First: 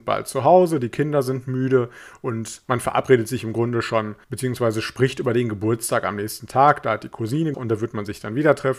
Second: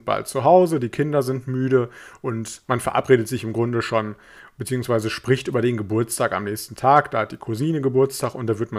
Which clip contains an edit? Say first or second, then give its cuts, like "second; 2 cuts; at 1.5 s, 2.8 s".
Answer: first; 2 cuts; at 4.2 s, 7.5 s